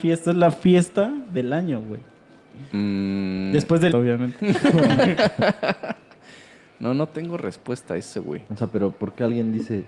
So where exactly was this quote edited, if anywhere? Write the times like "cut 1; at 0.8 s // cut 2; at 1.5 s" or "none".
cut 1; at 3.9 s // cut 2; at 8.5 s

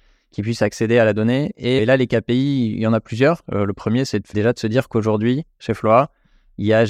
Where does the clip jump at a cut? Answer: cut 1; at 1.8 s // cut 2; at 4.3 s

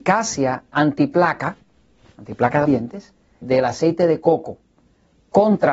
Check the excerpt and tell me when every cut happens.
cut 1; at 2.7 s // cut 2; at 3.4 s

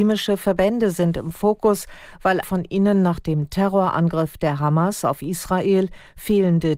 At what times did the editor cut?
cut 1; at 2.4 s

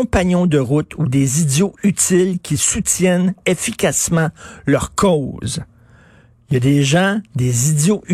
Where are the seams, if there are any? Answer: none

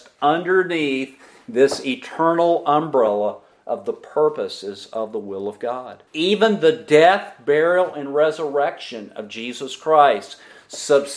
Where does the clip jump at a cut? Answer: cut 1; at 6.1 s

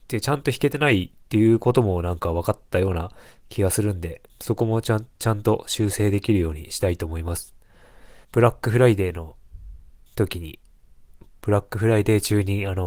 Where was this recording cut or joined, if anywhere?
cut 1; at 4.3 s // cut 2; at 8.2 s // cut 3; at 10.1 s

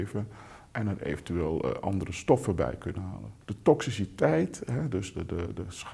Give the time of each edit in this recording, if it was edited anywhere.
cut 1; at 3.4 s

